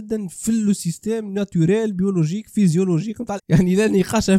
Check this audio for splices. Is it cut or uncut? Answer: cut